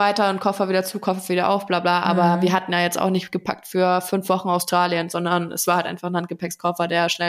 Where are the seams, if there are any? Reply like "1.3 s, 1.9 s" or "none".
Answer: none